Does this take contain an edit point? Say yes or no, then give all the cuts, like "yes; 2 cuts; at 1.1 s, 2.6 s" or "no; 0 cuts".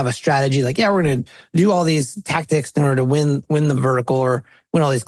no; 0 cuts